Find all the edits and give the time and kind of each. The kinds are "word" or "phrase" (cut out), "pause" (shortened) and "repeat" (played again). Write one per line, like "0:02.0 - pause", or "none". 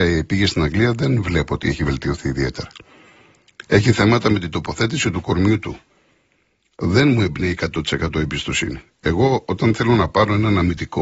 none